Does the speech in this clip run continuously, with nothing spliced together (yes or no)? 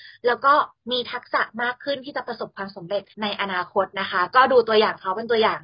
no